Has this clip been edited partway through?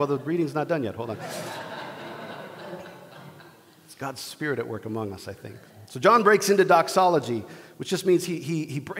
no; 0 cuts

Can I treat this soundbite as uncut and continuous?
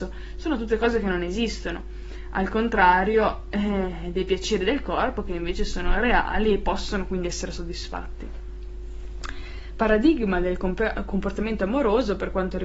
yes; 0 cuts

